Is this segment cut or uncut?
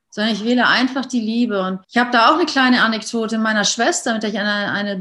cut